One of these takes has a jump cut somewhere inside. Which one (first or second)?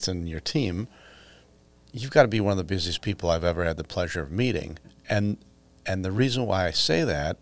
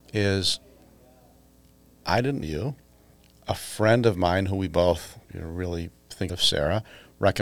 second